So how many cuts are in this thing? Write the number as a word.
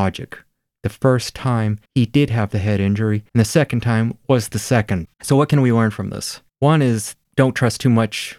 four